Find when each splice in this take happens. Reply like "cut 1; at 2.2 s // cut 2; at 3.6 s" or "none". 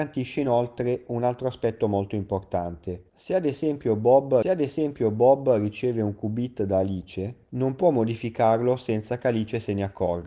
cut 1; at 4.4 s